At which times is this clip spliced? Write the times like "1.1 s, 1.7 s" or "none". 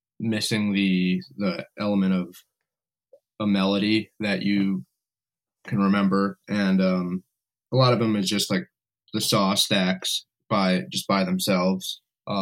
none